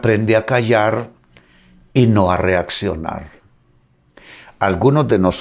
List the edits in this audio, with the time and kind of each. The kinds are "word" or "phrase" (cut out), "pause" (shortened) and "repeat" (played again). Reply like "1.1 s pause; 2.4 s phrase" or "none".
none